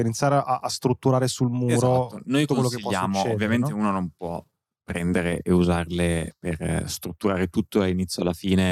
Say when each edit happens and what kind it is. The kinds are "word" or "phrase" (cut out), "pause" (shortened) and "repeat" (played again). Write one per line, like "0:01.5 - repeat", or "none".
none

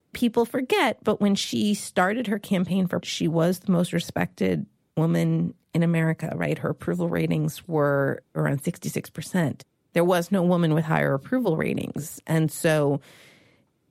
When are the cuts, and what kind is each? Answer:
0:03.0 - word

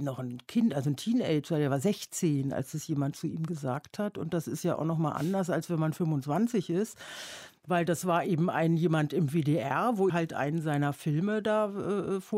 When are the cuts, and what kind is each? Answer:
0:10.1 - word

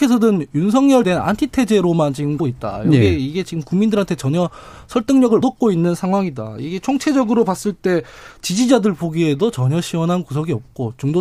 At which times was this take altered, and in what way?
0:01.0 - word
0:02.4 - word
0:05.4 - word

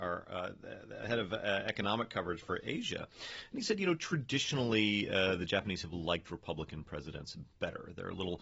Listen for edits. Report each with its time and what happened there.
none

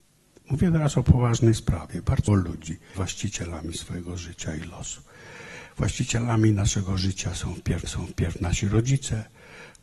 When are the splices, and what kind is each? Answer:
0:02.3 - word
0:02.9 - word
0:07.9 - repeat

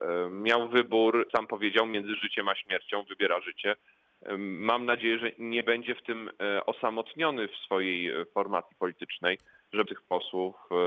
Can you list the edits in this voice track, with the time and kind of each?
0:01.3 - word
0:09.9 - word

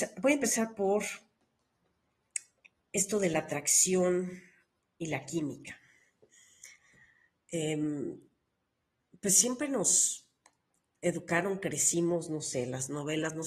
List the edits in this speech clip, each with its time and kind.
none

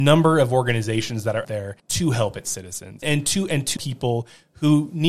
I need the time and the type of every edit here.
0:01.4 - word
0:01.8 - pause
0:03.0 - word
0:03.8 - word

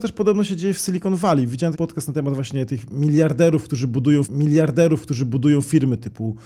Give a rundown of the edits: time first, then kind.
0:01.7 - word
0:04.2 - repeat

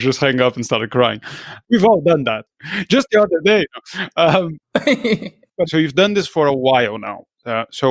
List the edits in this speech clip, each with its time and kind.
0:05.7 - word

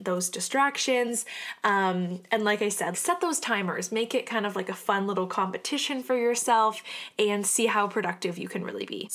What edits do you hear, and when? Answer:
0:02.9 - word

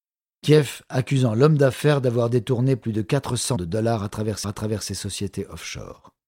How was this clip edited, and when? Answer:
0:03.6 - word
0:04.4 - repeat

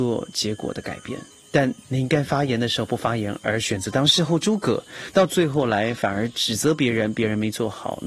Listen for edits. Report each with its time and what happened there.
0:01.3 - pause

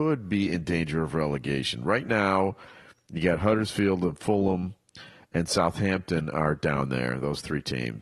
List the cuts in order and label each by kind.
none

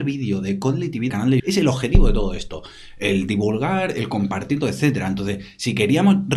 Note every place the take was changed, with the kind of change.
0:01.1 - word
0:01.4 - word
0:04.6 - word

